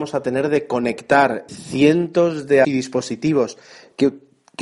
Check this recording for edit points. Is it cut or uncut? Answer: cut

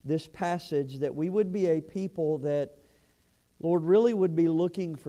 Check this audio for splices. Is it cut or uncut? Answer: uncut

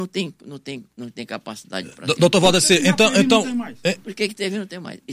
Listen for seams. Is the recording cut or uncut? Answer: uncut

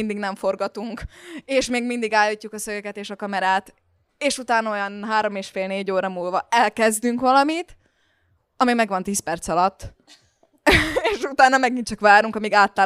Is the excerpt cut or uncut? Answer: uncut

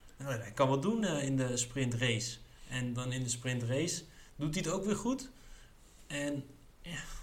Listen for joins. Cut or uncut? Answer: uncut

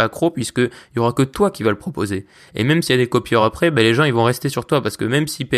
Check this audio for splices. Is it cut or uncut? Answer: uncut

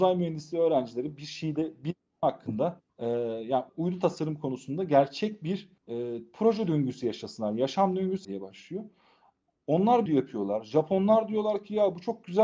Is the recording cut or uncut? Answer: cut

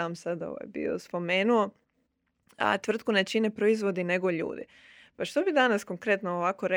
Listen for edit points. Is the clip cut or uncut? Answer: uncut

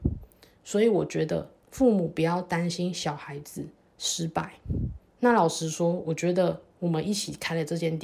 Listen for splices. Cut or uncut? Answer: cut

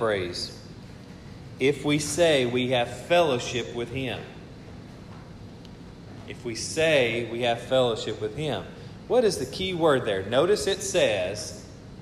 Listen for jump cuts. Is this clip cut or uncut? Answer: uncut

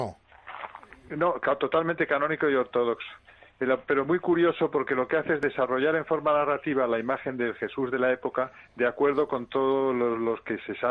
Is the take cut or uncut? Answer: uncut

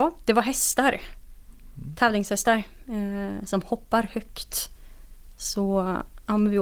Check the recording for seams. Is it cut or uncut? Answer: uncut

